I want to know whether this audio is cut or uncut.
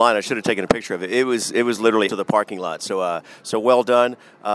cut